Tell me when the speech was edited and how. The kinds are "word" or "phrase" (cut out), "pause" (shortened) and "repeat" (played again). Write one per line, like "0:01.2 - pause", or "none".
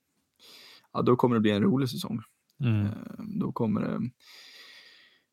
none